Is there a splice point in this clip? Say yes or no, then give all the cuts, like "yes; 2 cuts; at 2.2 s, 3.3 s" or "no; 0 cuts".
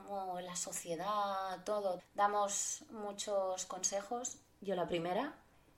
yes; 1 cut; at 2.0 s